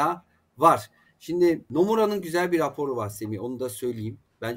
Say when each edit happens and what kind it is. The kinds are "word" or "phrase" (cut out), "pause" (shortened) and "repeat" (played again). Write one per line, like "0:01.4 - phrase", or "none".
none